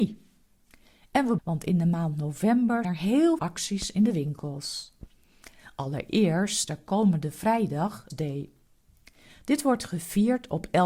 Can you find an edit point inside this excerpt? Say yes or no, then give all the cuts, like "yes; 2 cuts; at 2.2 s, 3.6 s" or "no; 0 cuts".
yes; 5 cuts; at 1.4 s, 2.8 s, 3.4 s, 6.7 s, 8.1 s